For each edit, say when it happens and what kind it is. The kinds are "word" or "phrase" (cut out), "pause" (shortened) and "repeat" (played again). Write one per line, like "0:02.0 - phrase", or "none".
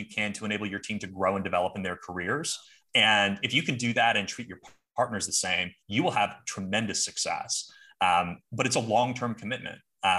none